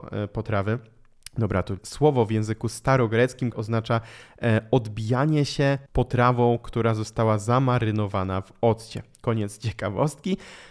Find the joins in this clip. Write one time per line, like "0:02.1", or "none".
0:01.8
0:03.5
0:05.9